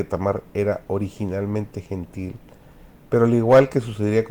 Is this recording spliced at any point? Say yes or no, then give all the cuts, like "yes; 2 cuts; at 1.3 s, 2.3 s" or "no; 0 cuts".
no; 0 cuts